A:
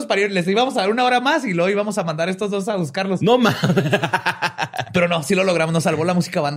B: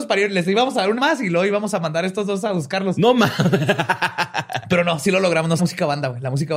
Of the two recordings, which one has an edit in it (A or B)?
B